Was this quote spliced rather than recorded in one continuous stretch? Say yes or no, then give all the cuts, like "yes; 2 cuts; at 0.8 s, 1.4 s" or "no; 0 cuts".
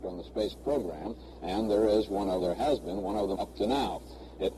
yes; 2 cuts; at 2.4 s, 3.4 s